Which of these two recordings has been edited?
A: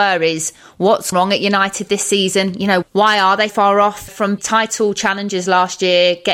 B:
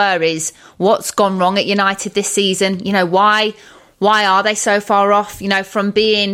A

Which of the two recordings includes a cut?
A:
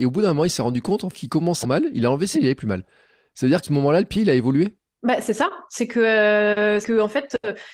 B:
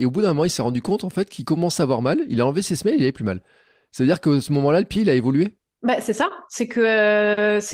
A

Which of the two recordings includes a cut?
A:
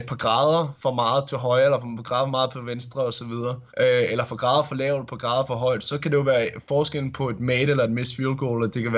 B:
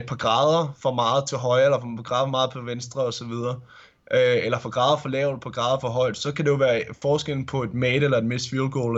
A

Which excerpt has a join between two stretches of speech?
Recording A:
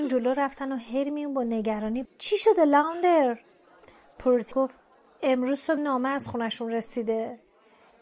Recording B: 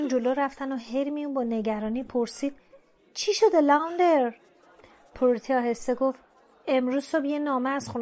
A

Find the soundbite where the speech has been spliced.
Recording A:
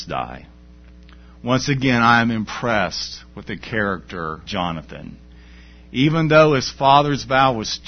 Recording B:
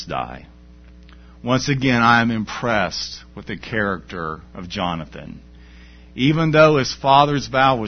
A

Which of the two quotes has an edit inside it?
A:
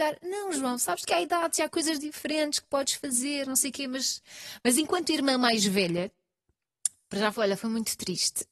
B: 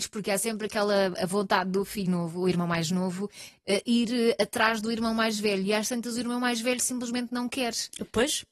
B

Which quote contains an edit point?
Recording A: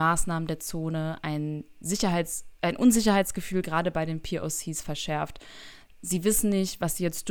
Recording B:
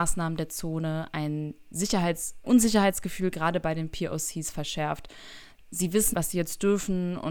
B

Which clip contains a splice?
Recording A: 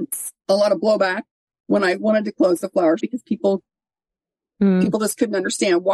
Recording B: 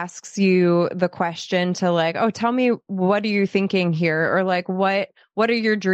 A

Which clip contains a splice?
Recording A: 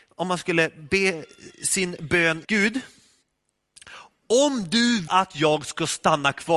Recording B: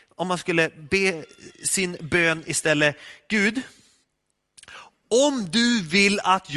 A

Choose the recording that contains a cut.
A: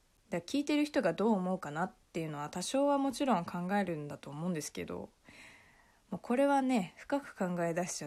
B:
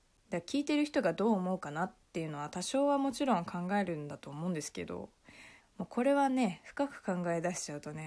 B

